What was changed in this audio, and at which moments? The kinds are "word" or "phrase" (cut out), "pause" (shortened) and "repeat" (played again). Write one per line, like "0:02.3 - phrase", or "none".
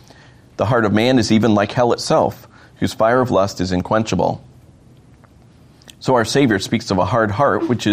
none